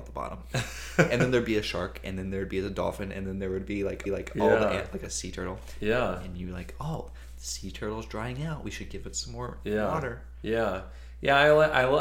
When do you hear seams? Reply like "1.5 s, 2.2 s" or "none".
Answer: 4.1 s